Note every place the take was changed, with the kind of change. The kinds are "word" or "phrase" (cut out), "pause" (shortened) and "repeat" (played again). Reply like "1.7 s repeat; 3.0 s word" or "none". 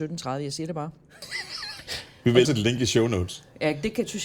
2.4 s phrase